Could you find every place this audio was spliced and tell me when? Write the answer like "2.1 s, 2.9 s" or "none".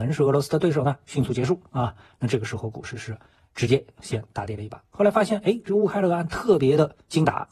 none

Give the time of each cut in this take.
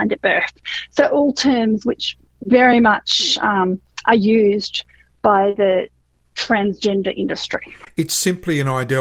none

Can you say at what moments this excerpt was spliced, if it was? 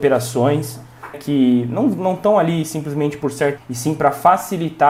1.1 s, 3.6 s

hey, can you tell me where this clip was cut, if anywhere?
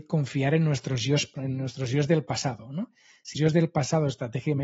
1.3 s, 3.3 s

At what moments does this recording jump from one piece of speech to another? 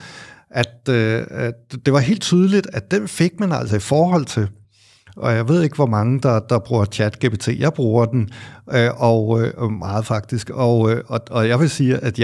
none

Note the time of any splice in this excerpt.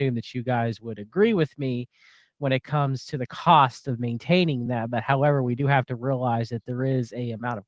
none

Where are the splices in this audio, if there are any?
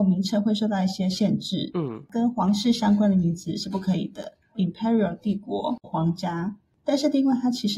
4.5 s, 5.8 s

